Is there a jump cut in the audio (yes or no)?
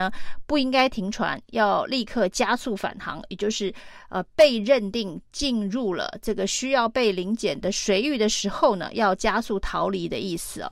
no